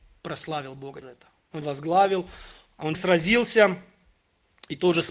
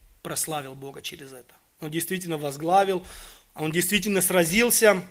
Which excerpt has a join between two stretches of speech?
first; 3 cuts; at 1.0 s, 1.6 s, 2.9 s

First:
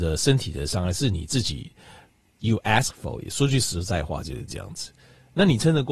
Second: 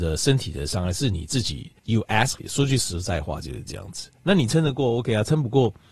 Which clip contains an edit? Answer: second; 3 cuts; at 1.8 s, 2.4 s, 4.1 s

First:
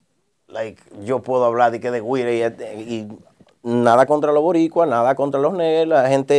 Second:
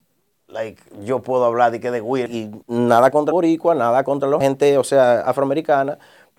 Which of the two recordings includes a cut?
second; 4 cuts; at 2.3 s, 2.6 s, 3.3 s, 4.4 s

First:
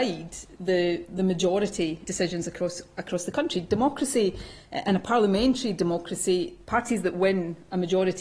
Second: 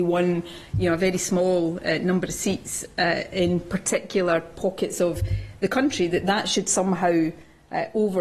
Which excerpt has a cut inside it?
first; 1 cut; at 2.1 s

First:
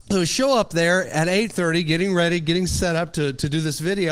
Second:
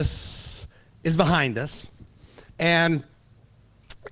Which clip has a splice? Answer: second; 1 cut; at 2.5 s

